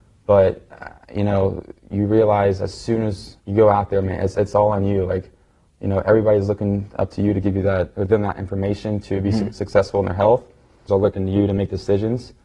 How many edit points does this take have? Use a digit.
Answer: 3